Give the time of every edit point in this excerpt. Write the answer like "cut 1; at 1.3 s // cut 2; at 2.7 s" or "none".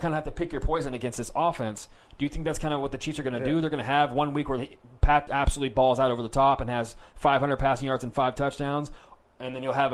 cut 1; at 5.3 s